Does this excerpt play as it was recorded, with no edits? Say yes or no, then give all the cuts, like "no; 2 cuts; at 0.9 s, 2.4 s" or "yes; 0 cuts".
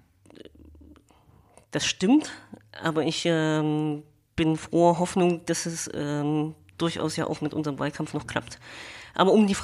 yes; 0 cuts